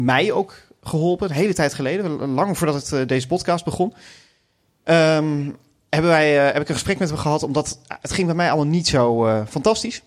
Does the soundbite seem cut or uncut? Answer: uncut